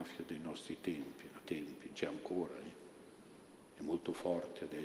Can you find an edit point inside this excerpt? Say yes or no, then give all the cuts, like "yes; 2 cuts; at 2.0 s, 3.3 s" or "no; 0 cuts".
yes; 2 cuts; at 1.4 s, 1.9 s